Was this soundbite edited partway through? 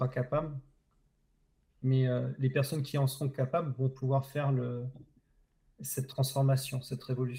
no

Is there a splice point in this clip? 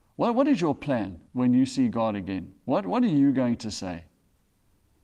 yes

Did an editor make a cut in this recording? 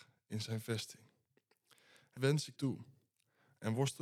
yes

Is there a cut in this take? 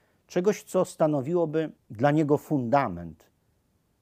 yes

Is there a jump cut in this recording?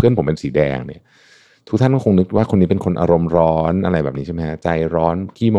no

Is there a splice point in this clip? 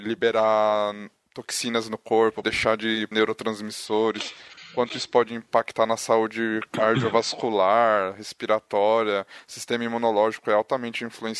yes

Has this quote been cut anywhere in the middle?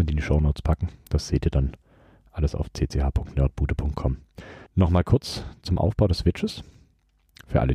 no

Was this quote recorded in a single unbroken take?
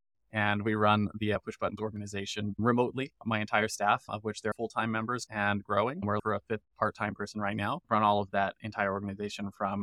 no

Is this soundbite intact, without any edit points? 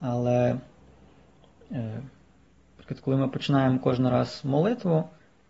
yes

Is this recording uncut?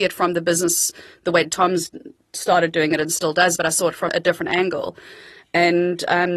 no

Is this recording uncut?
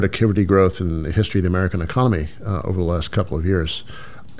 yes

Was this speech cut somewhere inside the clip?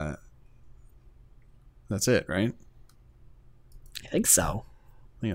no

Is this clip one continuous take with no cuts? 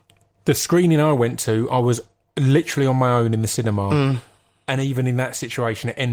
yes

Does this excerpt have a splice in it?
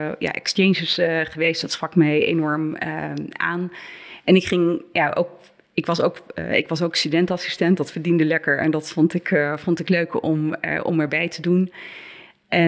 no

